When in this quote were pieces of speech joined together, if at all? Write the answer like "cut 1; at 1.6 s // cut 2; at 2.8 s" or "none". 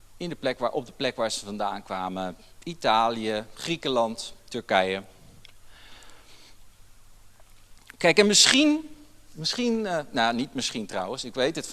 none